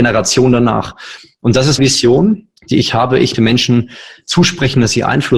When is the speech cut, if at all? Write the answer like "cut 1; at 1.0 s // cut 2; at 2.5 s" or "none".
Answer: cut 1; at 1.8 s // cut 2; at 2.6 s // cut 3; at 3.3 s

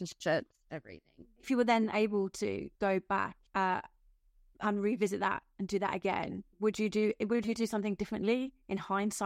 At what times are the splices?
cut 1; at 1.4 s // cut 2; at 2.7 s // cut 3; at 3.5 s // cut 4; at 6.5 s

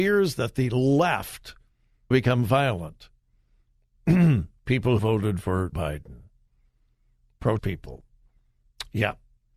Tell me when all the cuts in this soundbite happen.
cut 1; at 2.1 s // cut 2; at 5.0 s // cut 3; at 5.7 s // cut 4; at 7.6 s

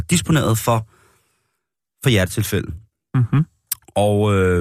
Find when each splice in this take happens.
none

